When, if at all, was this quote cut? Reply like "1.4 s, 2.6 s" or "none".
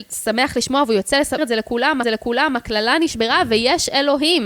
1.4 s, 2.0 s